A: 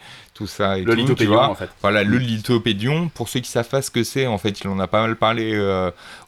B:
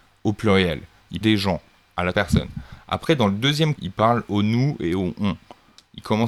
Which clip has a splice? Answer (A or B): B